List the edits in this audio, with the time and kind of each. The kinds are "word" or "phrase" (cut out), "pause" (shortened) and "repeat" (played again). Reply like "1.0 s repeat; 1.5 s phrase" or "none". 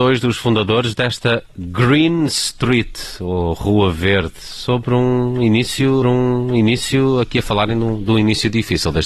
6.0 s repeat